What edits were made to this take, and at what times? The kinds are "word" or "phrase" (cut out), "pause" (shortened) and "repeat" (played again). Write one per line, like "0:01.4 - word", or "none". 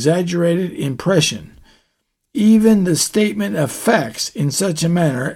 none